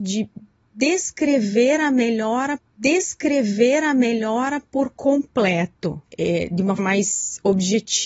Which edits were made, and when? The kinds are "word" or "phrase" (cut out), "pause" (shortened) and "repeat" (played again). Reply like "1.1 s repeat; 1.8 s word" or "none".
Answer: 2.6 s repeat; 6.1 s pause; 6.8 s word